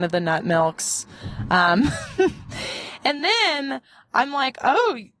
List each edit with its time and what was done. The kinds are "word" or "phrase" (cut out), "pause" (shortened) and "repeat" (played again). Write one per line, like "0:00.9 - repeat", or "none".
none